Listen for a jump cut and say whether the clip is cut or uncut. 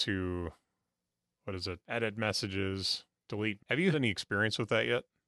cut